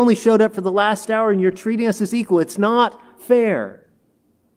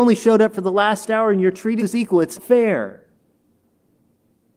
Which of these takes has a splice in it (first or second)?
second